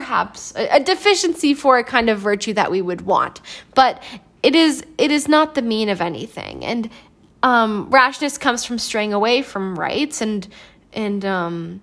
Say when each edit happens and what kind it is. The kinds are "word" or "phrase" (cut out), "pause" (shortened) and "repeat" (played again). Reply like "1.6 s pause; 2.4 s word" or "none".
none

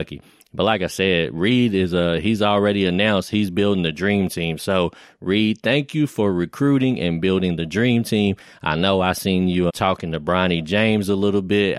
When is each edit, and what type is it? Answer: 9.7 s word

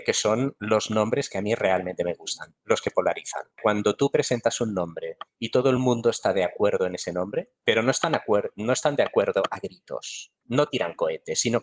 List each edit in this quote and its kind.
none

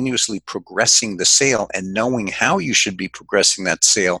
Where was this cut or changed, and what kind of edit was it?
none

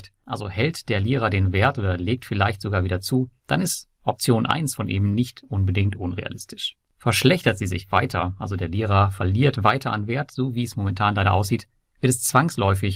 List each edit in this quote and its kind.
3.4 s pause

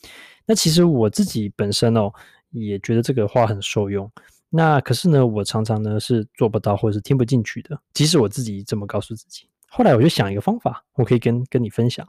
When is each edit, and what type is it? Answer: none

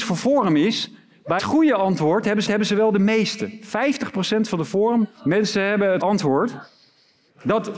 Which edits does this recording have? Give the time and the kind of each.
1.4 s word; 2.5 s repeat; 5.1 s pause; 6.0 s word

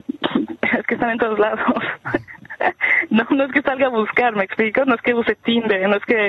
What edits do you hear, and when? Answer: none

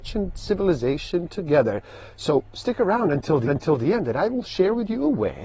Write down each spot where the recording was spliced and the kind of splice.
3.5 s repeat

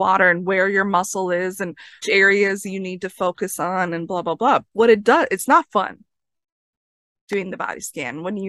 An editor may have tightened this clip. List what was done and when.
2.0 s word; 4.7 s pause

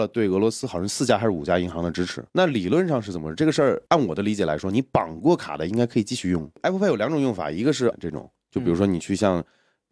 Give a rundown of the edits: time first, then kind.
2.3 s pause; 3.9 s pause; 7.9 s word

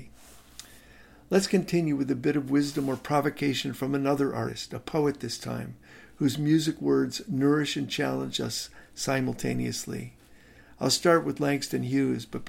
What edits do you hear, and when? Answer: none

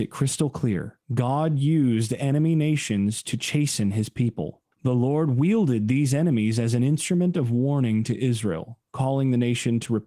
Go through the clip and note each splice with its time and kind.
1.0 s pause; 4.7 s pause

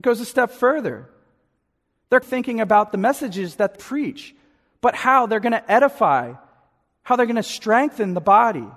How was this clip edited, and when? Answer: 2.2 s word; 3.7 s word

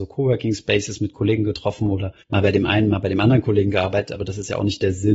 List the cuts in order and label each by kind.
2.2 s pause

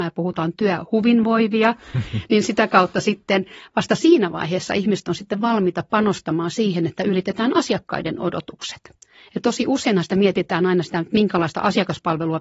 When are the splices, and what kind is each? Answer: none

